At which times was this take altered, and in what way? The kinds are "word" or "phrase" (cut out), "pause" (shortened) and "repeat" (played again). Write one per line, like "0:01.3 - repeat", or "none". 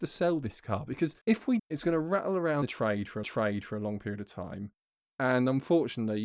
0:01.2 - pause
0:01.6 - word
0:02.6 - word
0:03.2 - repeat